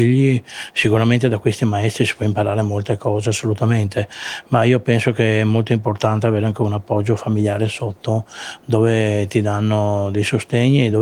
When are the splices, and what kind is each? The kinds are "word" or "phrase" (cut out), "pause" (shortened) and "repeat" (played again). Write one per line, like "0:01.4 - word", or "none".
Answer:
none